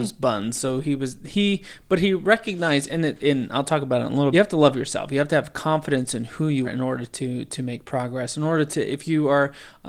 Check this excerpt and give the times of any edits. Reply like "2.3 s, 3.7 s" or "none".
4.3 s, 6.6 s

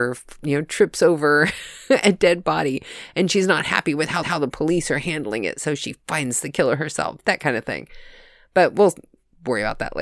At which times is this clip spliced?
4.2 s

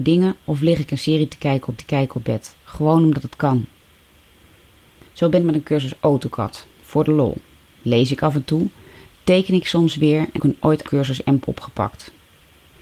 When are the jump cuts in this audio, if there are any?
1.8 s, 5.4 s, 10.4 s, 10.8 s, 11.4 s

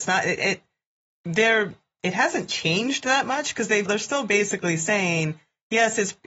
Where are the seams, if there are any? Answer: 3.9 s

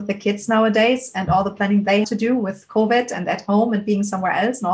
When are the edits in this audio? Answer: 2.0 s

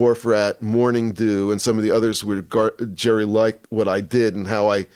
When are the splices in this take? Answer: 3.6 s

